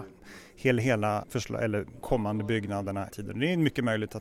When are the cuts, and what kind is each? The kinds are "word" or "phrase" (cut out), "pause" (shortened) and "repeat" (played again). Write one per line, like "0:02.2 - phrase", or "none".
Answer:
0:01.2 - word
0:02.0 - word
0:03.1 - word

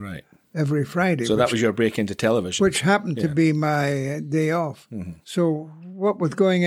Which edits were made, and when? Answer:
none

